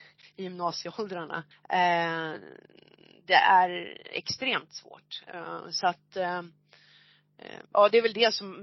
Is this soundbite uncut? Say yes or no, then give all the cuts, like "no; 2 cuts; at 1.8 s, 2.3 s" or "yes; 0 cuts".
no; 2 cuts; at 1.5 s, 7.7 s